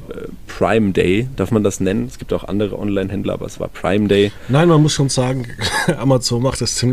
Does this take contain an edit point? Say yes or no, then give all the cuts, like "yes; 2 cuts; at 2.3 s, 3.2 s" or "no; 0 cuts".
no; 0 cuts